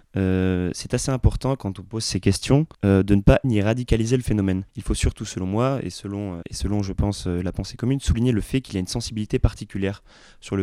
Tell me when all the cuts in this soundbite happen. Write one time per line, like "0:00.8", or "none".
0:02.7
0:03.4
0:04.7
0:06.4

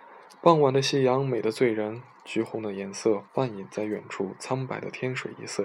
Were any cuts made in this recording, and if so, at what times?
0:03.3

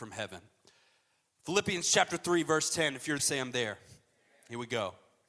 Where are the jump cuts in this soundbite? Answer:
0:03.2

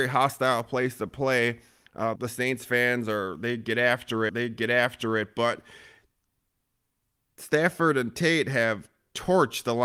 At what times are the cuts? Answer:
0:02.2
0:04.3

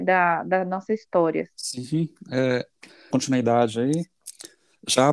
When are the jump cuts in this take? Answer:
0:01.6
0:03.1

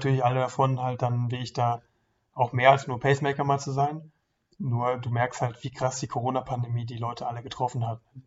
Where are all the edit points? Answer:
none

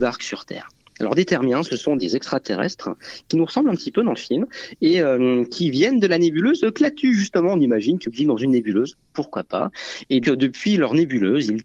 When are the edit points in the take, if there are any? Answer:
0:02.0
0:08.0
0:10.2

